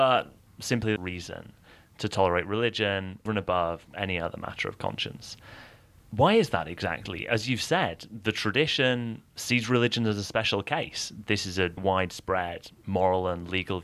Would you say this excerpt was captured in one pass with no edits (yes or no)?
no